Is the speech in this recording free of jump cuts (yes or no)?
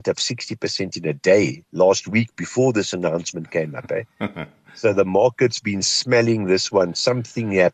yes